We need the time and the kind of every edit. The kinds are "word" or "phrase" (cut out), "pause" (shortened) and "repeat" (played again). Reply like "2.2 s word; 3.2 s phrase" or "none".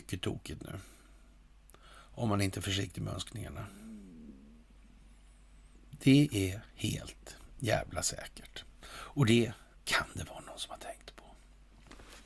9.7 s pause